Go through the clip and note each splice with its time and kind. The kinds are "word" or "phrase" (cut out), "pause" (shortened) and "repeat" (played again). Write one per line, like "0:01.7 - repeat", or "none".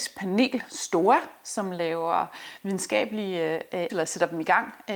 0:03.9 - word